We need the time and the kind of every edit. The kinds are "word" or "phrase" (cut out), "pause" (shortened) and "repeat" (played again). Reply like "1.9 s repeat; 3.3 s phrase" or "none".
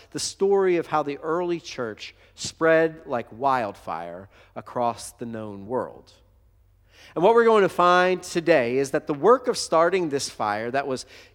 none